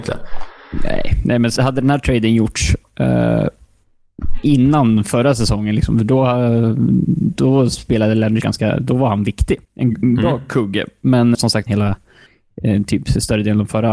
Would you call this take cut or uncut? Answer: cut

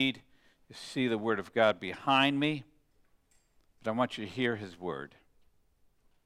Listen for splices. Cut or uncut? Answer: uncut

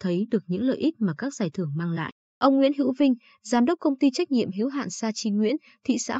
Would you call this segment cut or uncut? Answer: uncut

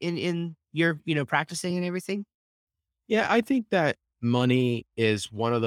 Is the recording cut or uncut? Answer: uncut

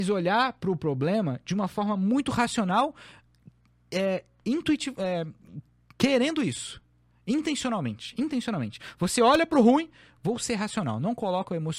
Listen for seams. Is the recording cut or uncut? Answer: uncut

